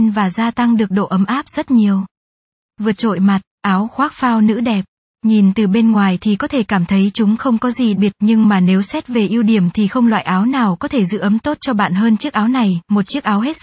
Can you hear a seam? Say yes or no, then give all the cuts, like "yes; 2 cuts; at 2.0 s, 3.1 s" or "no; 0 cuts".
yes; 2 cuts; at 3.2 s, 7.9 s